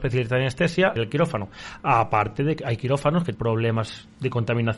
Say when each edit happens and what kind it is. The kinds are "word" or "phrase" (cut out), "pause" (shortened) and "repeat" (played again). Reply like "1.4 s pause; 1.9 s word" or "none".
1.0 s phrase; 2.6 s word; 3.3 s word